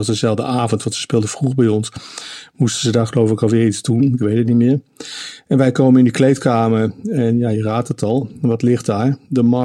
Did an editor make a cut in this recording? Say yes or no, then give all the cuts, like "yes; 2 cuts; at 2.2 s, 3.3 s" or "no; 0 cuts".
no; 0 cuts